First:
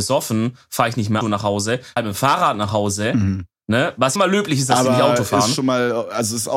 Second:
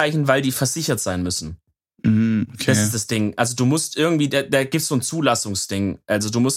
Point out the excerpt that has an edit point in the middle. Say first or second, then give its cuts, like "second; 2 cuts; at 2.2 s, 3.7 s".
first; 3 cuts; at 1.2 s, 2.0 s, 4.2 s